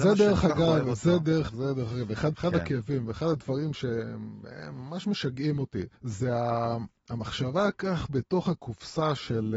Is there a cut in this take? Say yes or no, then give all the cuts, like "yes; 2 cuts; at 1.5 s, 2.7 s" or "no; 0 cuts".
yes; 4 cuts; at 1.5 s, 2.3 s, 5.9 s, 7.7 s